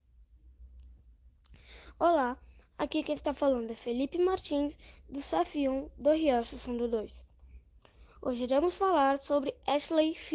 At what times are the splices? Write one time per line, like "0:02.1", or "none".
none